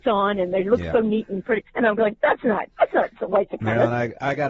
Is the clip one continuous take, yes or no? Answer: no